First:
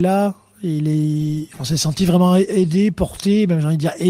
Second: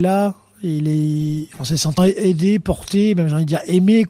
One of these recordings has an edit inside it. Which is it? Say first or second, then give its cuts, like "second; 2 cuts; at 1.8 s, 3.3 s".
second; 1 cut; at 2.0 s